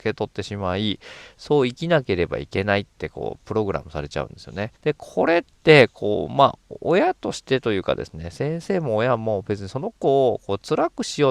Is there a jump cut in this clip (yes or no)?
yes